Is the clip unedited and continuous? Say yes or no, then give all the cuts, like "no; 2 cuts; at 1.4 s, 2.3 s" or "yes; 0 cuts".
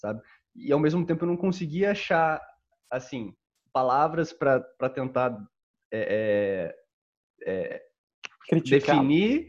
yes; 0 cuts